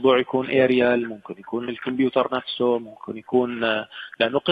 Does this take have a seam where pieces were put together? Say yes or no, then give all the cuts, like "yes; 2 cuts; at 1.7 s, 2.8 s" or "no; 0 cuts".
no; 0 cuts